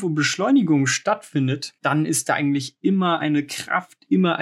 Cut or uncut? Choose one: cut